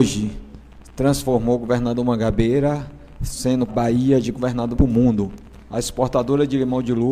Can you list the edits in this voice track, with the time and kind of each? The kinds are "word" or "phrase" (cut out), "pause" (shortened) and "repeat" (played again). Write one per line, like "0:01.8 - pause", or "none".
0:03.7 - phrase
0:04.7 - word